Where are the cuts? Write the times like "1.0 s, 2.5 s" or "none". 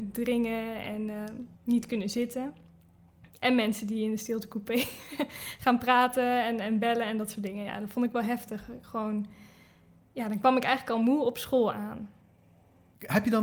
1.5 s